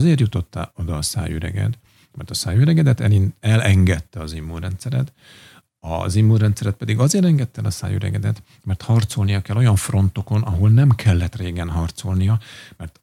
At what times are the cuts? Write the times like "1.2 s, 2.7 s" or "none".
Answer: none